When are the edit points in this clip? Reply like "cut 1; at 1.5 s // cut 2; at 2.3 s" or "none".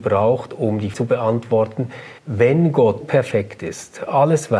cut 1; at 0.9 s // cut 2; at 2.2 s // cut 3; at 3.0 s